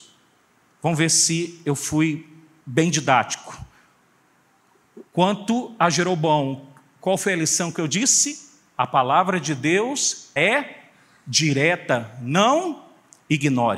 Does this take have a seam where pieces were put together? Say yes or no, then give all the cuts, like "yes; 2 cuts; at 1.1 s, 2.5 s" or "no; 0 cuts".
yes; 2 cuts; at 5.1 s, 10.4 s